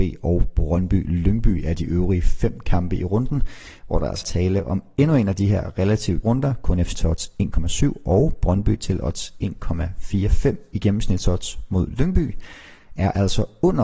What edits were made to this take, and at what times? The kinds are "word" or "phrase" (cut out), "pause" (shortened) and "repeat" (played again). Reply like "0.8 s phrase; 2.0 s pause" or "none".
4.2 s word; 6.2 s word; 6.9 s word